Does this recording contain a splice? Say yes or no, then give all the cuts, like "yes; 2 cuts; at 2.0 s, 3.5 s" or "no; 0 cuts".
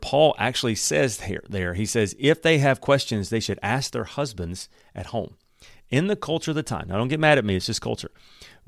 no; 0 cuts